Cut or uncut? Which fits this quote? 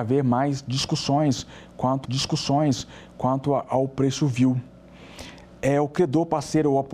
cut